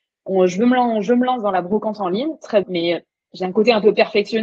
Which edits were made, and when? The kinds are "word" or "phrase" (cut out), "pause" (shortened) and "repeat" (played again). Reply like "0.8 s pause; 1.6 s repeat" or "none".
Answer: 2.6 s word; 3.1 s pause